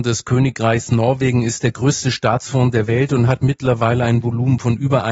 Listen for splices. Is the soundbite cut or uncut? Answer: uncut